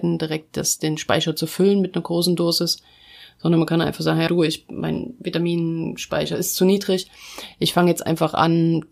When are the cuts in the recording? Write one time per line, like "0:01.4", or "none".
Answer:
0:04.3

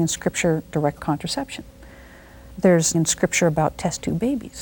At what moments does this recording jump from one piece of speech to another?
0:01.0
0:02.9

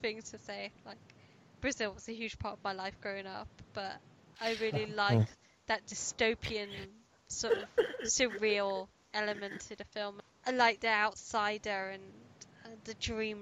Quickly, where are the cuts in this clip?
none

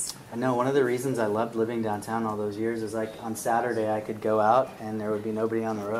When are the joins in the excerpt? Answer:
none

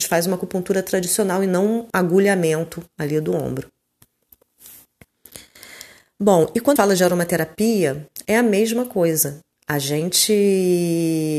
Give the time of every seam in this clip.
0:01.9
0:06.8

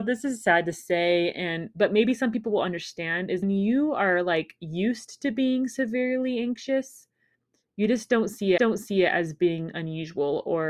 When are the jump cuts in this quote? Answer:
0:03.4
0:08.6

